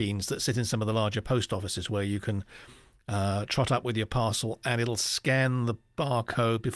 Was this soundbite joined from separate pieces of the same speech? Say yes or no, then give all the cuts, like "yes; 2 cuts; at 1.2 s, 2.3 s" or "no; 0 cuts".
no; 0 cuts